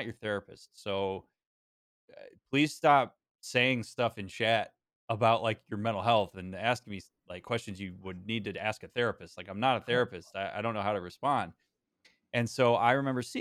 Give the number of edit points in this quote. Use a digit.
0